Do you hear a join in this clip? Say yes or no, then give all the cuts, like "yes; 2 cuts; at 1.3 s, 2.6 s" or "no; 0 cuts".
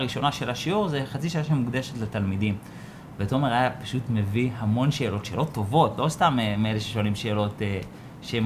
no; 0 cuts